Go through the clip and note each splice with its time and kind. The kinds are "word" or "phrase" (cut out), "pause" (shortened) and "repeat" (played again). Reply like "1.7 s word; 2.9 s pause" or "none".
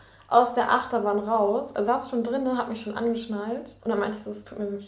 1.9 s word; 3.8 s pause